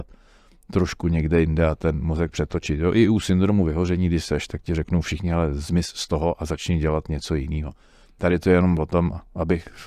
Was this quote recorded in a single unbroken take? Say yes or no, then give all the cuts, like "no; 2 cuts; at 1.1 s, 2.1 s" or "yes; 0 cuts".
yes; 0 cuts